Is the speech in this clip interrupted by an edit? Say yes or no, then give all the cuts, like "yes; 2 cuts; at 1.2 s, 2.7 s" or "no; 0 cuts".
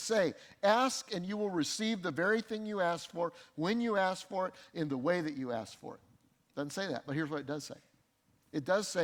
no; 0 cuts